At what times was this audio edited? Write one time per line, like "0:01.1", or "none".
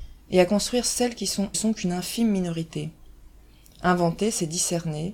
0:01.5